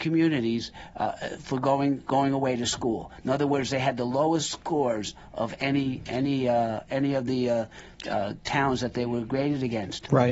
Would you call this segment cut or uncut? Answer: uncut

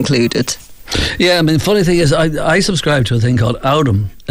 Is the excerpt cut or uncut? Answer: uncut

